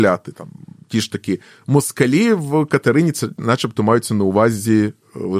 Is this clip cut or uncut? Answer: uncut